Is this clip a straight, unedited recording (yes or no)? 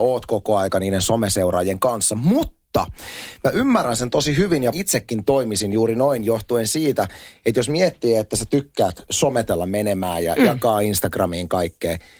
no